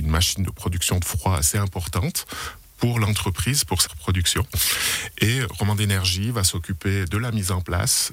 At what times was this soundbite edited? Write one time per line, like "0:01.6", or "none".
0:03.9